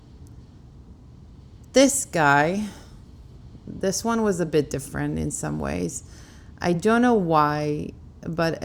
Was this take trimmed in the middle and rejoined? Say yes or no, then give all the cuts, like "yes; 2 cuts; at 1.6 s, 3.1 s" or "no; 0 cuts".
no; 0 cuts